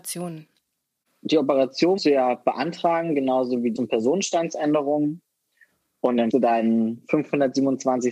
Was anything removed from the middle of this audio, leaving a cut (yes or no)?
yes